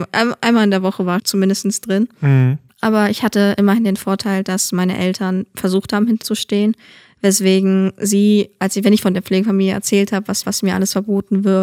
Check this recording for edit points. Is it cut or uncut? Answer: cut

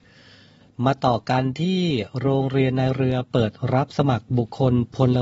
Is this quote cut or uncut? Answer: uncut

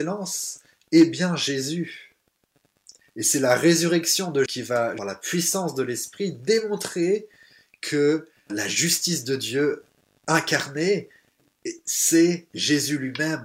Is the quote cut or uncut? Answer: cut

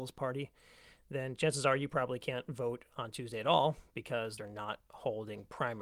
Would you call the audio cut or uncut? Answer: cut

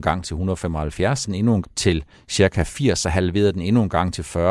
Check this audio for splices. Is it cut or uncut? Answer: cut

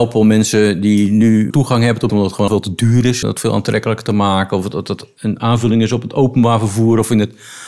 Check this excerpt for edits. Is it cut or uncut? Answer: cut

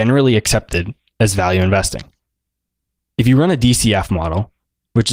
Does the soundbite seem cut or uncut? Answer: uncut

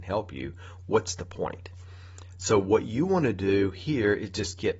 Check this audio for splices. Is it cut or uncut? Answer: uncut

